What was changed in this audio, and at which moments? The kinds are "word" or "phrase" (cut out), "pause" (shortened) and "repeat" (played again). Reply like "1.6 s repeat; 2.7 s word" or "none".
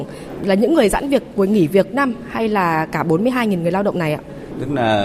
1.9 s word